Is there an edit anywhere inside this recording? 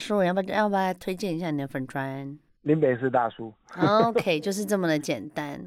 no; 0 cuts

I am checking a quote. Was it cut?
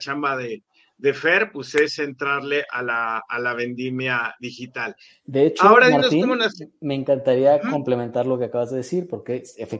no; 0 cuts

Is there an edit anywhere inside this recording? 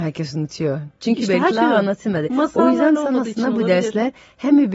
yes; 1 cut; at 1.5 s

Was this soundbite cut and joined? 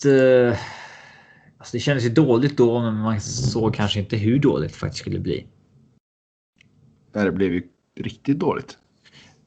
no; 0 cuts

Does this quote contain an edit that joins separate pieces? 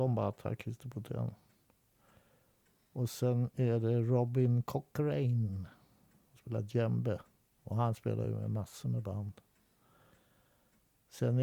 no; 0 cuts

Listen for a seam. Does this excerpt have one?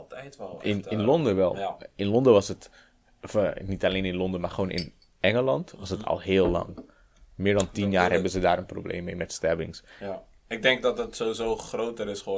no; 0 cuts

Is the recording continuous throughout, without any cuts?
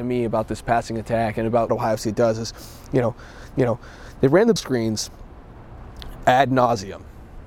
no; 3 cuts; at 1.7 s, 3.6 s, 4.6 s

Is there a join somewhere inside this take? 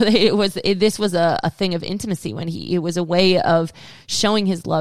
no; 0 cuts

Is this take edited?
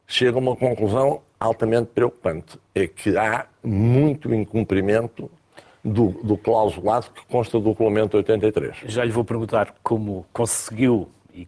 no; 0 cuts

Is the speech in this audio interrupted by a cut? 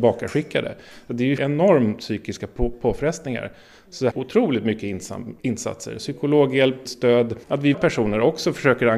yes; 6 cuts; at 1.4 s, 4.1 s, 5.4 s, 6.9 s, 7.4 s, 7.7 s

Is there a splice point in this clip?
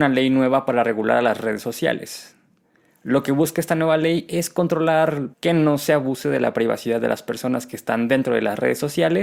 yes; 1 cut; at 5.3 s

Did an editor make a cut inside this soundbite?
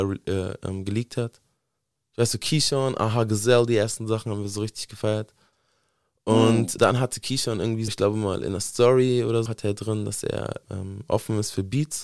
yes; 4 cuts; at 6.8 s, 7.9 s, 9.5 s, 10.6 s

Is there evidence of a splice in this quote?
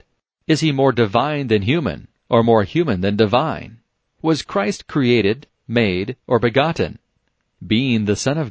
no; 0 cuts

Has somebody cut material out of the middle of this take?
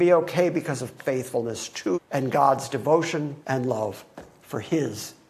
yes; 3 cuts; at 1.0 s, 1.9 s, 3.4 s

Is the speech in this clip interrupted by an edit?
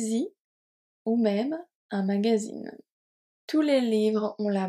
no; 0 cuts

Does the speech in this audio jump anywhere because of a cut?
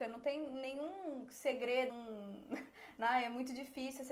yes; 1 cut; at 1.9 s

